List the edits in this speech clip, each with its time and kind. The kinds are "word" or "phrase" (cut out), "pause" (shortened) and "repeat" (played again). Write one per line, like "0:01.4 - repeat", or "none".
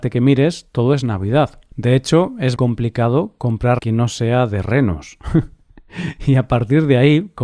0:02.6 - word
0:03.8 - word